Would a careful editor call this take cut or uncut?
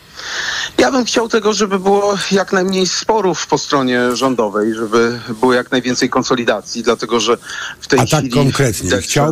uncut